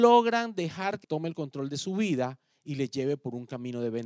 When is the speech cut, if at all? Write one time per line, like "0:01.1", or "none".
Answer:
0:01.0